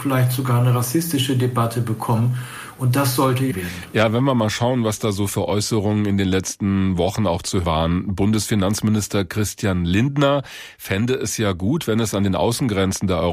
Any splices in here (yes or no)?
yes